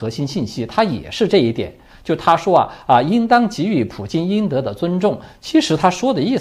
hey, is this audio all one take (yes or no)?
yes